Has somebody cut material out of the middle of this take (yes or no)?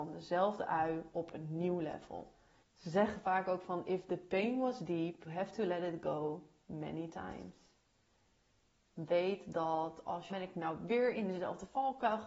yes